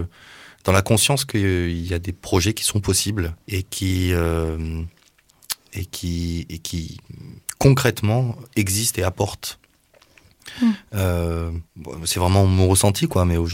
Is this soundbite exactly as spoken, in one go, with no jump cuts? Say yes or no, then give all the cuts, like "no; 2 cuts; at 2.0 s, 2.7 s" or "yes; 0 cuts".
no; 2 cuts; at 3.4 s, 11.7 s